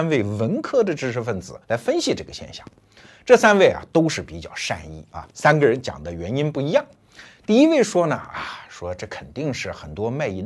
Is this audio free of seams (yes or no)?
no